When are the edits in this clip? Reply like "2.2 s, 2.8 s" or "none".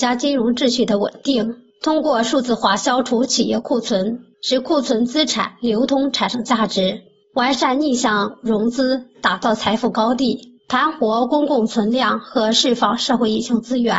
1.7 s, 4.3 s, 7.2 s, 10.6 s